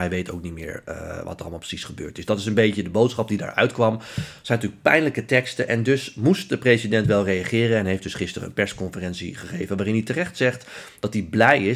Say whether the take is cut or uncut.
uncut